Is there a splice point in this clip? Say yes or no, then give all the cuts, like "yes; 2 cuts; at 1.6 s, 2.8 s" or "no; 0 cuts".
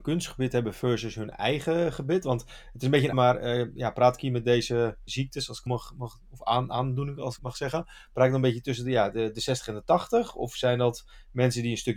yes; 4 cuts; at 3.1 s, 5.1 s, 5.7 s, 7.4 s